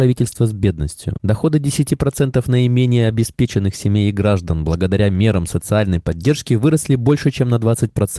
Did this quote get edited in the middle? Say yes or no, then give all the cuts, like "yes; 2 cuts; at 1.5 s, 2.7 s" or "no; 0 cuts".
no; 0 cuts